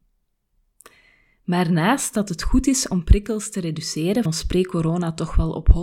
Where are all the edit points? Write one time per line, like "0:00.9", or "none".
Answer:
0:04.3